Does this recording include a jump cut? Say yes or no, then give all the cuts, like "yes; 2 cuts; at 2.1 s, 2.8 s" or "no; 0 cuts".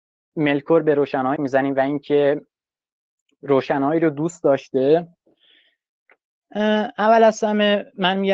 yes; 1 cut; at 1.4 s